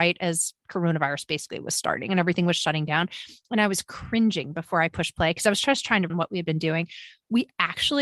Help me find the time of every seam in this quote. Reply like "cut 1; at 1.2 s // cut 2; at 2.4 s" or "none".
cut 1; at 6.1 s